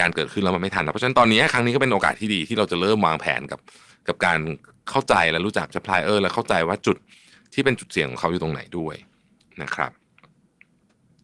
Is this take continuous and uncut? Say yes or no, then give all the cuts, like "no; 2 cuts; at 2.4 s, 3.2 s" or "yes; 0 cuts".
no; 1 cut; at 5.7 s